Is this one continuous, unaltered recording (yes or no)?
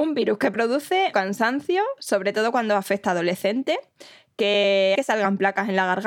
no